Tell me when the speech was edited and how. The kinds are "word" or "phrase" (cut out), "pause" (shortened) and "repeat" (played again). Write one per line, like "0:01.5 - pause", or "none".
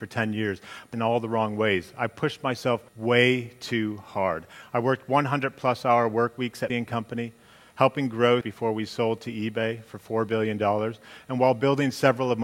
0:00.9 - phrase
0:02.9 - pause
0:06.7 - word
0:08.4 - word